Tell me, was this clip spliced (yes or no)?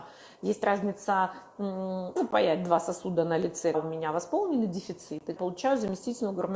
yes